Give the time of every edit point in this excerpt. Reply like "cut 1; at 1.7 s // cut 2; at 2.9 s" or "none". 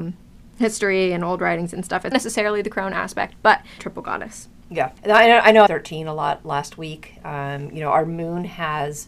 cut 1; at 2.1 s // cut 2; at 3.8 s // cut 3; at 5.0 s // cut 4; at 5.7 s